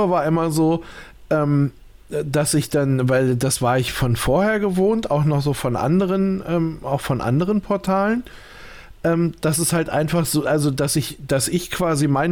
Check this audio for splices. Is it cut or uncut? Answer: uncut